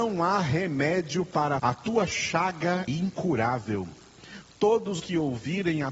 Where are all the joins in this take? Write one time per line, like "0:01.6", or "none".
0:01.6
0:02.9
0:05.0